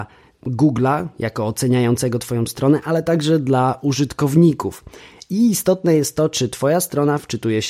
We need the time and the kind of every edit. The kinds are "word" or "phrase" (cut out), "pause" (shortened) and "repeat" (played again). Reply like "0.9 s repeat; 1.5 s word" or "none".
none